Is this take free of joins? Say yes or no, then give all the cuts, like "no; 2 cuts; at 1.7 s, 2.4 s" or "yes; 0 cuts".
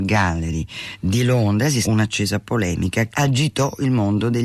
no; 2 cuts; at 1.8 s, 3.1 s